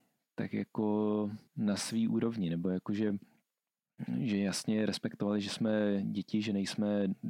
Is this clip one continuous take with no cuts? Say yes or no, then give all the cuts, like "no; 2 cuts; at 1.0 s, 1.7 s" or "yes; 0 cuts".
yes; 0 cuts